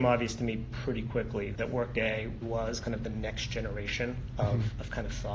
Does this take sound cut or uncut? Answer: cut